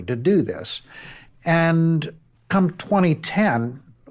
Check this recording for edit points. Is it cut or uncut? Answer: cut